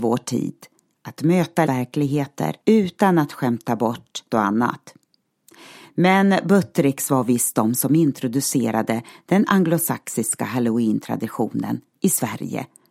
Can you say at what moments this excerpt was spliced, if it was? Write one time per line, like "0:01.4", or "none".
0:01.7
0:02.6
0:04.3